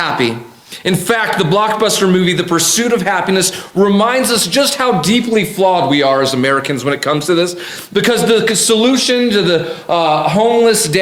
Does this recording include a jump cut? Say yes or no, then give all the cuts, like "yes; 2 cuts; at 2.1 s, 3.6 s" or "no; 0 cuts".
no; 0 cuts